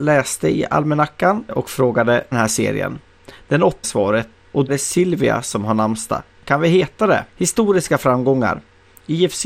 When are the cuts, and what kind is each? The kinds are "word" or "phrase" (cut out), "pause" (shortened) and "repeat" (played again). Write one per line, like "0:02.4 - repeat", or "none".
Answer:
0:01.5 - word
0:02.3 - phrase
0:03.8 - phrase
0:04.7 - phrase
0:07.3 - pause

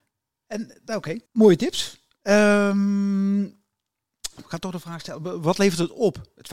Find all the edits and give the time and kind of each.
0:01.3 - pause
0:04.4 - word

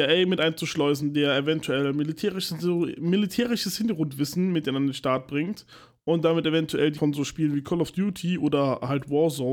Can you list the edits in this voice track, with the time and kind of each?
0:07.0 - word

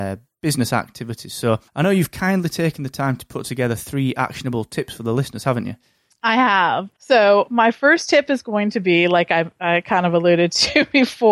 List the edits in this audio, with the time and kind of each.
0:01.7 - pause
0:06.1 - pause
0:06.9 - pause

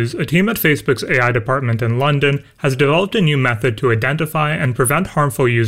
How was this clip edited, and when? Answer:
none

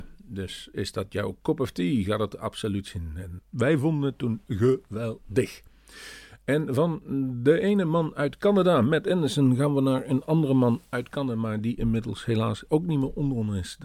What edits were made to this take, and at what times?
0:03.4 - word

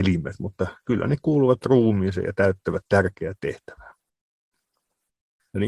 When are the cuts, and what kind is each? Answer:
none

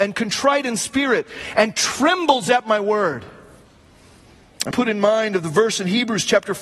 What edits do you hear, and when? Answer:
0:04.7 - word

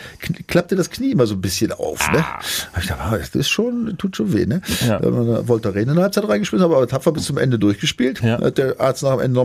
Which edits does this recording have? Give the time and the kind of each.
none

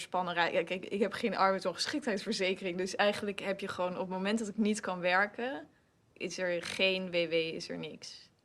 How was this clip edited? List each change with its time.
none

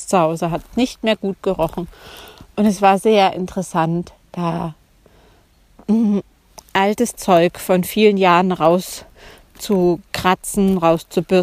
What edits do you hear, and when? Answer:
none

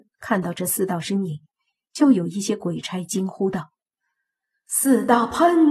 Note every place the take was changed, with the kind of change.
none

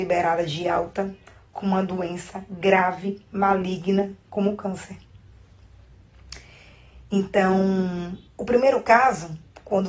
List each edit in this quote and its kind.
0:08.3 - pause

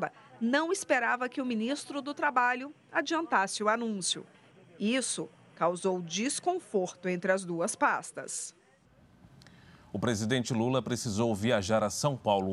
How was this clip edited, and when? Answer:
none

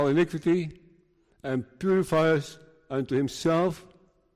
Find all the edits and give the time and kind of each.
none

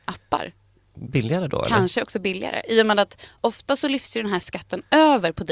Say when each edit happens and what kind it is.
0:01.1 - word

